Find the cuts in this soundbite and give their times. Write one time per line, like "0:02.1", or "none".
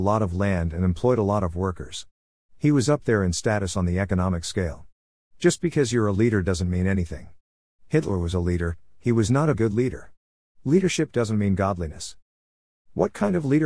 0:09.5